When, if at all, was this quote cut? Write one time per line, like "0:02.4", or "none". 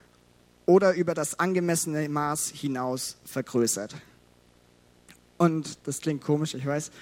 none